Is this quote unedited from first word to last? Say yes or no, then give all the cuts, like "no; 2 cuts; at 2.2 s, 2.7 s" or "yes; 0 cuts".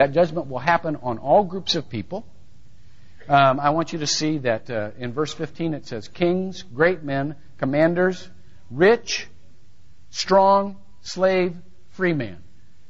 yes; 0 cuts